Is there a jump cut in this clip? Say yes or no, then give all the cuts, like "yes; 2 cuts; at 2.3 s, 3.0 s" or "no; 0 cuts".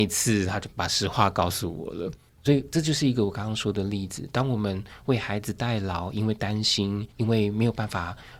yes; 1 cut; at 7.1 s